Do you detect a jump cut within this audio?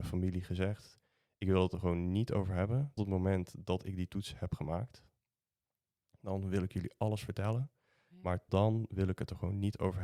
yes; 2 cuts; at 3.0 s, 8.5 s

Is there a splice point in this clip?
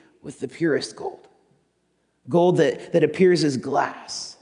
no; 0 cuts

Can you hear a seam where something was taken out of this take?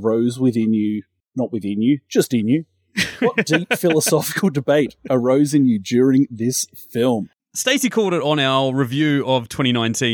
no; 0 cuts

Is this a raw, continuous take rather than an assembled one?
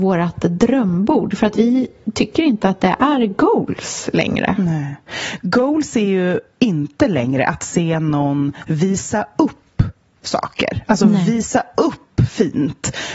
yes; 0 cuts

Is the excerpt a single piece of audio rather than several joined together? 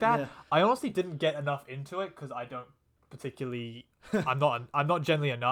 yes; 0 cuts

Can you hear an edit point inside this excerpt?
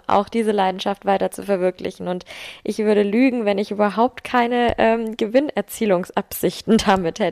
no; 0 cuts

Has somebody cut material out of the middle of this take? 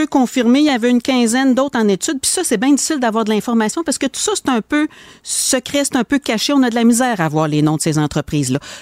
no; 0 cuts

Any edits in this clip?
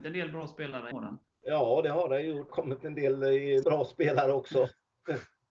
yes; 4 cuts; at 0.9 s, 1.2 s, 2.5 s, 3.6 s

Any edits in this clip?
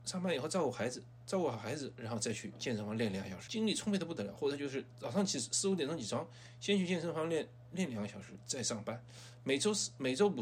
yes; 1 cut; at 3.5 s

